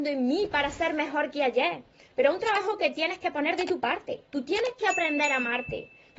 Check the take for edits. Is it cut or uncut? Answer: cut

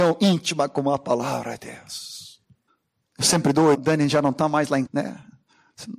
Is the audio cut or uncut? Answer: cut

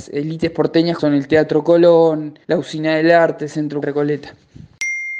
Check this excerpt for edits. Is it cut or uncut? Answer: cut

